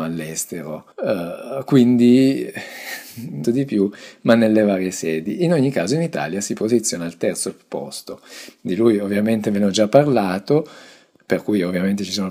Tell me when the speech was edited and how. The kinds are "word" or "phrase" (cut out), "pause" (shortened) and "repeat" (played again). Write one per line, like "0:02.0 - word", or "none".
0:00.9 - pause
0:03.4 - phrase

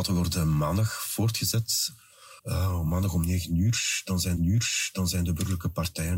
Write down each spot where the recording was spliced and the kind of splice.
0:02.4 - pause
0:04.4 - repeat

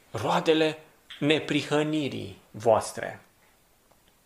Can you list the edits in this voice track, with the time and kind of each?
0:02.4 - pause

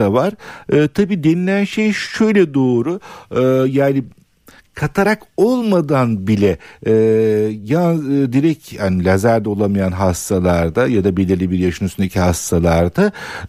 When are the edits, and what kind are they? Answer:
none

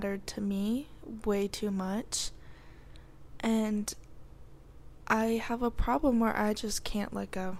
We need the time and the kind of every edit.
none

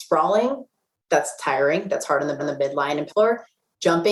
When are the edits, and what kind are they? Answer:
0:02.4 - repeat
0:03.1 - word

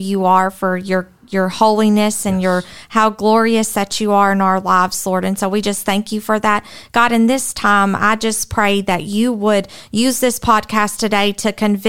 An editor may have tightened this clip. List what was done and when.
none

